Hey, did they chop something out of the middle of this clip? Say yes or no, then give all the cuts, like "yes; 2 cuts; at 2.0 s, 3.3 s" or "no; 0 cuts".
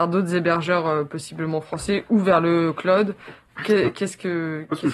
yes; 1 cut; at 3.5 s